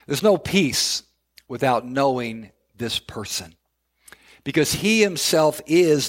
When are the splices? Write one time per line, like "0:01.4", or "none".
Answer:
none